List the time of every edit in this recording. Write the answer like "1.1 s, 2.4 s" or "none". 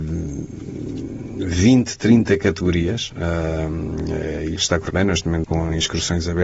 4.6 s, 4.9 s, 5.4 s

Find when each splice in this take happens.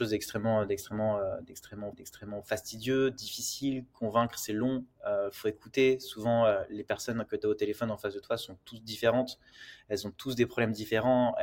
1.9 s

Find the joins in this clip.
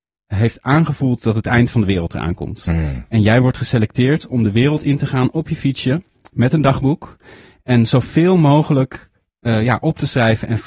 none

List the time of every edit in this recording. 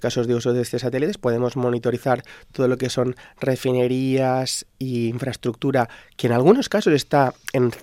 none

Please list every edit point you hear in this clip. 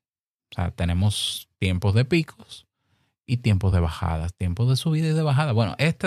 none

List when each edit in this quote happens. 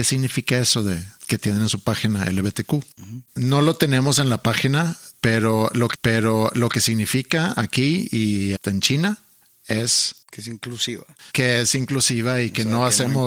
1.2 s, 3.3 s, 5.9 s, 8.6 s, 9.4 s, 11.3 s

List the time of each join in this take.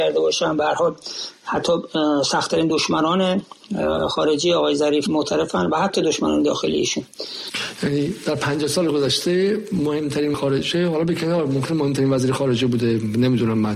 5.1 s, 10.3 s

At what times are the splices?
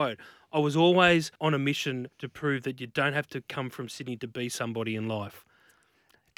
1.4 s, 2.1 s

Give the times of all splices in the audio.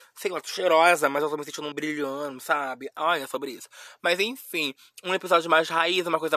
1.7 s

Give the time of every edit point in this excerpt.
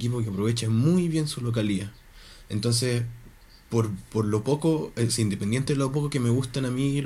none

